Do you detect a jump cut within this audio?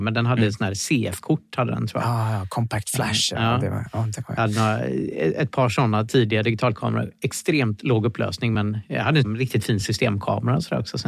no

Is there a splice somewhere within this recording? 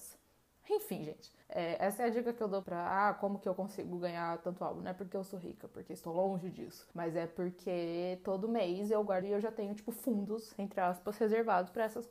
yes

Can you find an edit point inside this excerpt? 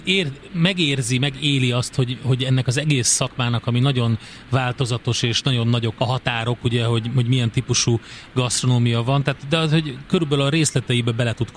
yes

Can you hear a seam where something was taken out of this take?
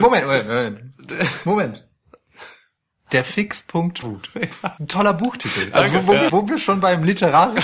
yes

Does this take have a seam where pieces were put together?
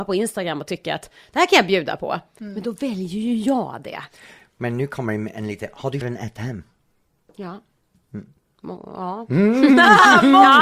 yes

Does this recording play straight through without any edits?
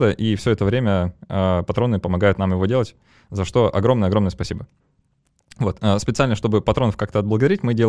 yes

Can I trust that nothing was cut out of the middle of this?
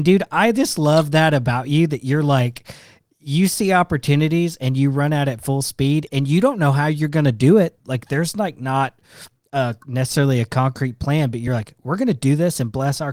yes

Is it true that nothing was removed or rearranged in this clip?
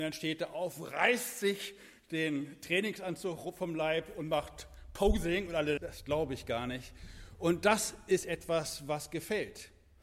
no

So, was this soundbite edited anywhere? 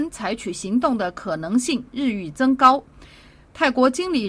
no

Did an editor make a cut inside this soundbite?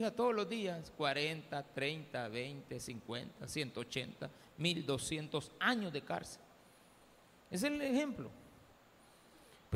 no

